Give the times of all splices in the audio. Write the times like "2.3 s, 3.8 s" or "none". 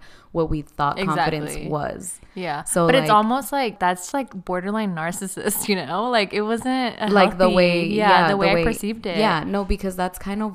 4.1 s

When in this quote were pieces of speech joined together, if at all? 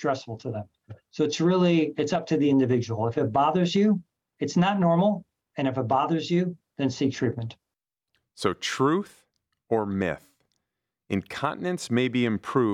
none

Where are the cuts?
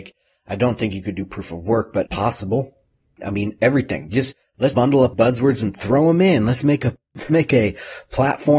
2.1 s, 4.7 s, 5.1 s, 7.3 s

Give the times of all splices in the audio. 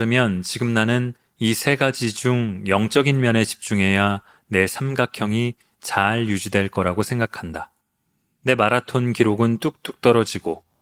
none

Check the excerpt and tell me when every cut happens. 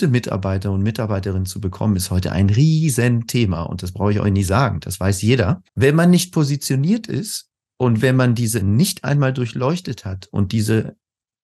5.7 s, 8.6 s

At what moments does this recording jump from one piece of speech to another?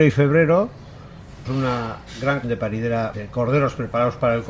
1.4 s, 2.4 s, 3.1 s

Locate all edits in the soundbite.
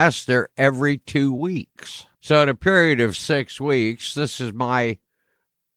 2.1 s

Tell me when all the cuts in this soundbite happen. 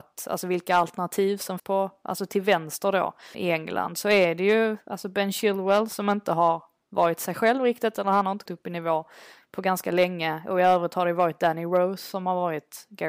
1.6 s, 3.3 s, 8.5 s

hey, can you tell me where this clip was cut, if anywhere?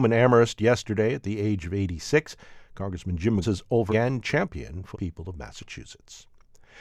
3.4 s, 3.9 s, 4.9 s

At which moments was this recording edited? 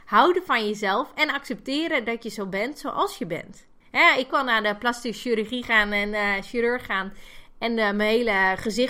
3.8 s, 4.3 s

